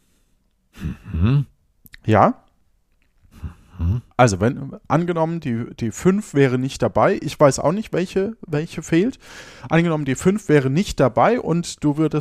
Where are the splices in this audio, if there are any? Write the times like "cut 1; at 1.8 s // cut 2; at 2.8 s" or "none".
cut 1; at 4.1 s